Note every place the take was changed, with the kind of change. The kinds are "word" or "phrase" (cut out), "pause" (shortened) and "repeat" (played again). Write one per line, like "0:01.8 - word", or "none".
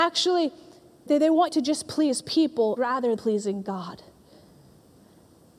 0:01.1 - word
0:01.5 - word
0:02.8 - word
0:03.2 - word